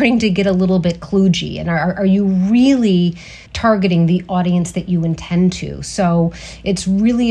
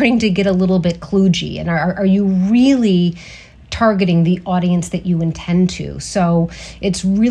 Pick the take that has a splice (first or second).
first